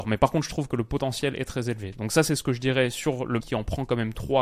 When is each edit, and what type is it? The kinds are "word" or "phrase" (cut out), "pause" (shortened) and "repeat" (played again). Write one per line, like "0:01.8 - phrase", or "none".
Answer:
0:03.4 - word